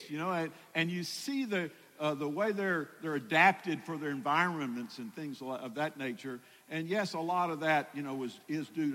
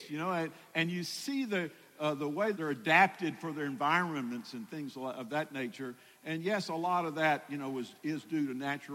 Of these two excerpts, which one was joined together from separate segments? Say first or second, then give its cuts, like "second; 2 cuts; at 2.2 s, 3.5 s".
second; 1 cut; at 2.5 s